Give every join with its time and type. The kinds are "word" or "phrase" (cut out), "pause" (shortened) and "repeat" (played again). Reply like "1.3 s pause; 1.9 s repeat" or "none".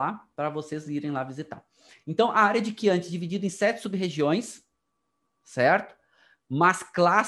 none